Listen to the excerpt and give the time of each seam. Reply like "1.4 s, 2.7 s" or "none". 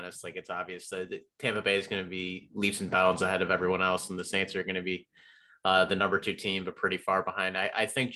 none